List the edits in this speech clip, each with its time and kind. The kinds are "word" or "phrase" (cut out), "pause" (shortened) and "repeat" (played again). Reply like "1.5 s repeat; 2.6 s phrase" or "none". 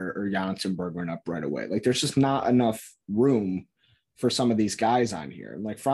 none